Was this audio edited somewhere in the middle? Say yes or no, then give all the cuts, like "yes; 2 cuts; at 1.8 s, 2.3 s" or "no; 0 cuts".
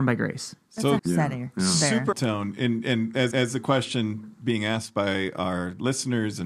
yes; 3 cuts; at 1.0 s, 2.1 s, 3.3 s